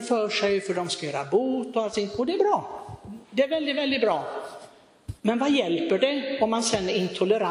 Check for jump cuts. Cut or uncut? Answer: cut